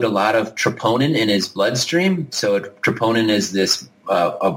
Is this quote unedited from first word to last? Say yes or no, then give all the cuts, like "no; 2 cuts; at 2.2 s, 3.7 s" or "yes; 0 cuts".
yes; 0 cuts